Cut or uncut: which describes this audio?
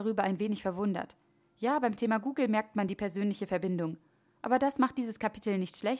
uncut